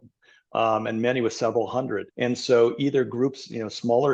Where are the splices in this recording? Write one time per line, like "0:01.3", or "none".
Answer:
0:02.1